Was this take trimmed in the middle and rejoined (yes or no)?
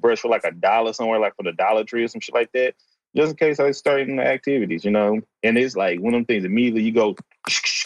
no